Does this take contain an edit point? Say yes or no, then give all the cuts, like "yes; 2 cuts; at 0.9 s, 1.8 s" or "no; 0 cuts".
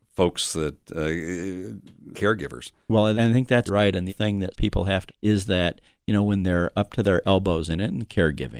yes; 6 cuts; at 2.1 s, 3.1 s, 3.7 s, 4.1 s, 4.5 s, 5.1 s